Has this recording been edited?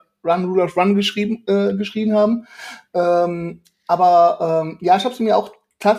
no; 0 cuts

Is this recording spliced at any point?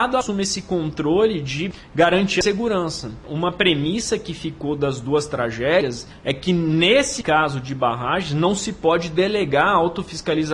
no; 0 cuts

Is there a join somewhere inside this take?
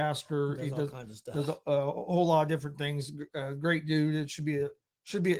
no; 0 cuts

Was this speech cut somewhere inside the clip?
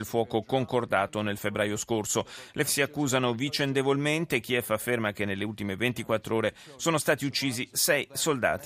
yes; 1 cut; at 2.7 s

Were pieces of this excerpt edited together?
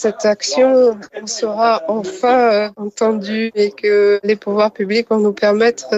no; 0 cuts

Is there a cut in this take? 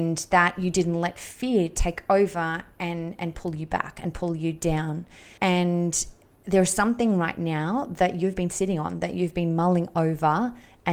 yes; 1 cut; at 5.4 s

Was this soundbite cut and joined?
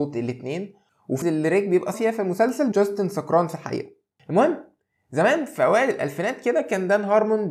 yes; 3 cuts; at 1.2 s, 1.9 s, 2.7 s

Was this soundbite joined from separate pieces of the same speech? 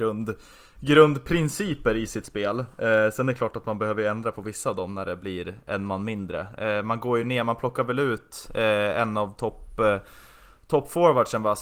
no; 0 cuts

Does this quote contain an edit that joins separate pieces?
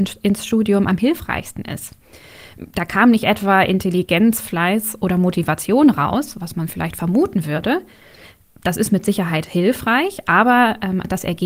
no; 0 cuts

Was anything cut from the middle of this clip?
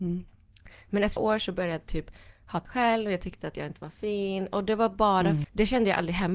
yes; 3 cuts; at 1.2 s, 2.6 s, 5.4 s

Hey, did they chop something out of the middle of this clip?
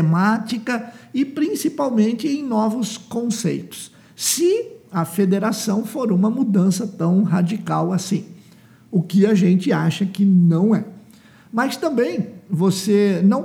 no; 0 cuts

